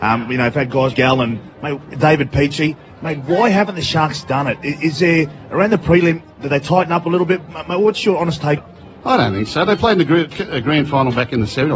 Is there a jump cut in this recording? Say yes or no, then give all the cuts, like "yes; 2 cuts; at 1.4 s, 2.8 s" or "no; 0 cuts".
yes; 2 cuts; at 0.9 s, 8.6 s